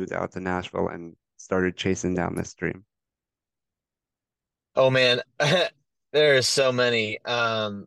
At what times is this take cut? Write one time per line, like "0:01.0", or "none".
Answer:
none